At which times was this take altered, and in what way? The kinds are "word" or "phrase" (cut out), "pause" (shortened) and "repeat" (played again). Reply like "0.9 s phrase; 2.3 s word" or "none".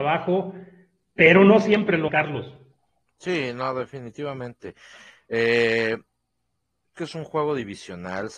2.1 s word; 7.0 s word